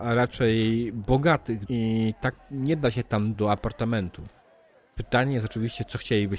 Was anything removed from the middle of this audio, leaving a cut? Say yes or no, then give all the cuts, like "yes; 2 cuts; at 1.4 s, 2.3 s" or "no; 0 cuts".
yes; 3 cuts; at 1.7 s, 2.4 s, 3.3 s